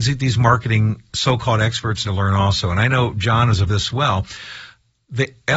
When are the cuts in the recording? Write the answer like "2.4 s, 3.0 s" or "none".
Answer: 1.1 s, 2.0 s, 3.7 s